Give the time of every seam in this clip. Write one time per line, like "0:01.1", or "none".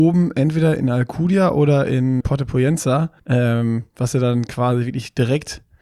0:02.2
0:03.2

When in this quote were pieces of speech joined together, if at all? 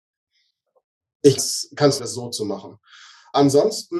0:01.4
0:02.0

